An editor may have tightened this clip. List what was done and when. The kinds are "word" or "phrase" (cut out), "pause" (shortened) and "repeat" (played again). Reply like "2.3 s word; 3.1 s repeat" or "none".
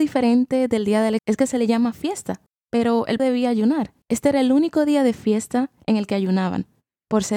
1.2 s word; 2.5 s pause; 3.2 s word; 4.0 s pause